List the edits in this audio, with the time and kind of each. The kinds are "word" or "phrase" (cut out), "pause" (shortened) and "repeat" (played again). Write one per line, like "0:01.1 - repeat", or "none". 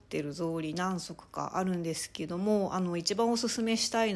none